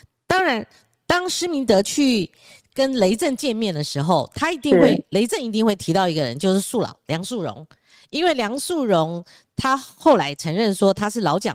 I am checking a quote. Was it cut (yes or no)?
no